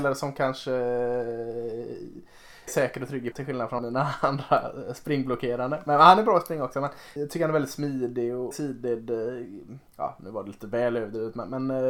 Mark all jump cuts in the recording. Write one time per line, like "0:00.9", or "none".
0:02.7
0:03.3
0:03.8
0:07.2
0:08.5
0:09.9